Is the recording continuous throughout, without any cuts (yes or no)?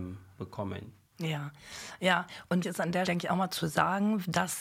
no